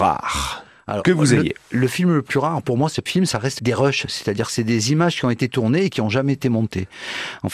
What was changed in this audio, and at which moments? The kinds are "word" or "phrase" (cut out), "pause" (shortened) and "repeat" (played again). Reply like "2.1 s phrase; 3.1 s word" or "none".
3.1 s word; 3.6 s word